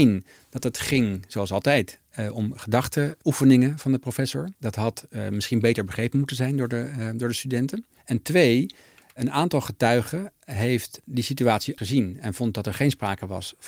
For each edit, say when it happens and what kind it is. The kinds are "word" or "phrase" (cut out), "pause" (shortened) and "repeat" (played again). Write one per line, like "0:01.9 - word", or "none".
0:04.6 - pause
0:08.0 - pause
0:11.8 - word